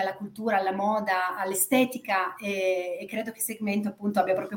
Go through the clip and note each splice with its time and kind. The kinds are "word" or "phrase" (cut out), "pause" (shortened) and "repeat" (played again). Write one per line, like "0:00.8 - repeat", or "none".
none